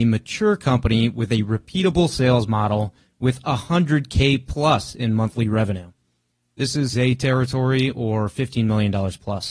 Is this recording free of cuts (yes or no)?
no